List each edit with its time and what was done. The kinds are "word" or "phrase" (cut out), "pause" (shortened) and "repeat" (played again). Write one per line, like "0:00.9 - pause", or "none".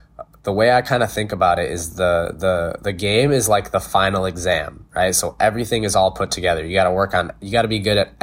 none